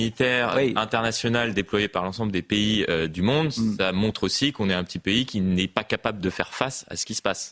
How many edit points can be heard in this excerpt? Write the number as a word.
zero